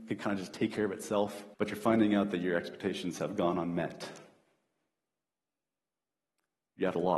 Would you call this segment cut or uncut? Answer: cut